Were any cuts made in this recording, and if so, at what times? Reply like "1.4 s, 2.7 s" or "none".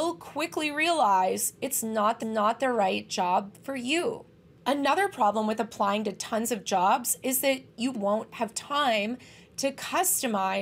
2.2 s, 7.9 s